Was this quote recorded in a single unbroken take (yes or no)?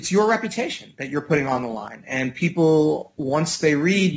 yes